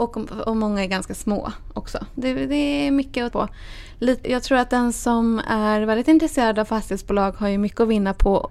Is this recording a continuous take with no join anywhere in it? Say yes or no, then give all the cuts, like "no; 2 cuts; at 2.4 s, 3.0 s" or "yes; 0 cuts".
no; 2 cuts; at 3.3 s, 4.2 s